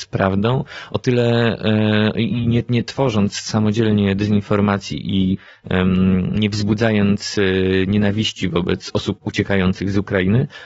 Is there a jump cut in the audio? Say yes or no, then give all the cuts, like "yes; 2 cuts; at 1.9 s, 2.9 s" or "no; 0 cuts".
no; 0 cuts